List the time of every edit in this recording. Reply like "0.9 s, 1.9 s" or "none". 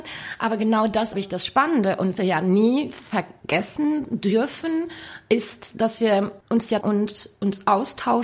1.1 s, 2.2 s, 6.4 s, 6.8 s